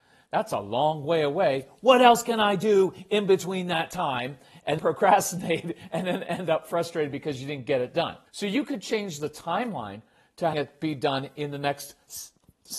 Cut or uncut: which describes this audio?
cut